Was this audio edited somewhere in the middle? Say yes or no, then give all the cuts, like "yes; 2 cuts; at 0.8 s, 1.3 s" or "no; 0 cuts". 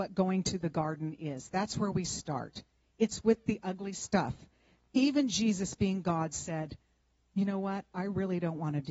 no; 0 cuts